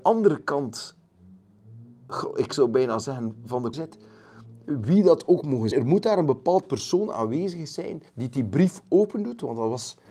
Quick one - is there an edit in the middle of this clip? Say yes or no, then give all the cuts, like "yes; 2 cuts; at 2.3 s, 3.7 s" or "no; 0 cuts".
yes; 3 cuts; at 3.7 s, 5.7 s, 8.1 s